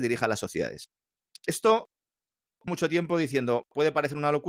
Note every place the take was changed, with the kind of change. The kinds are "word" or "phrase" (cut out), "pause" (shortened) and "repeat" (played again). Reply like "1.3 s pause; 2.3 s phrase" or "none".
2.7 s word

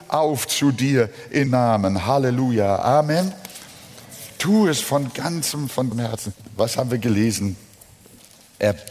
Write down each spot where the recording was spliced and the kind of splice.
1.5 s word; 5.9 s phrase

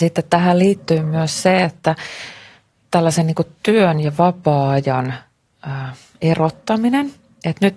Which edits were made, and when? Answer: none

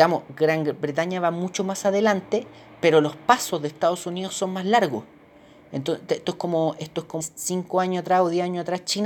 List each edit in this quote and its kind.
7.2 s word

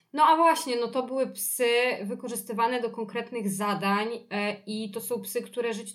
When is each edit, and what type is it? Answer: none

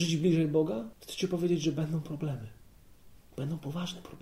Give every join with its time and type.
0.9 s pause

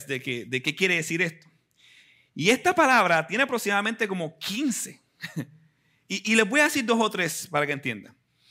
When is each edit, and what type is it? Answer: none

